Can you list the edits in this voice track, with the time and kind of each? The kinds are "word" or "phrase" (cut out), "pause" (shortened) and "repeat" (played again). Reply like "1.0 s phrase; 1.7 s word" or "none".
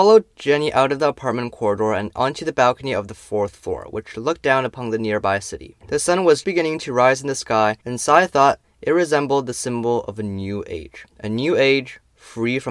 5.8 s pause; 6.4 s word; 7.8 s pause; 11.1 s pause